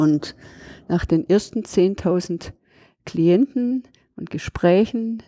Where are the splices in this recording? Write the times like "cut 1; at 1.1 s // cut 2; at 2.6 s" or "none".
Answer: none